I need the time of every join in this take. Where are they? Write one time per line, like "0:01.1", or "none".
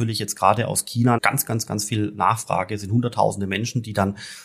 0:01.2